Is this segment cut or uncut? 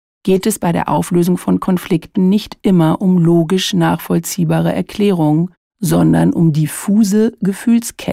cut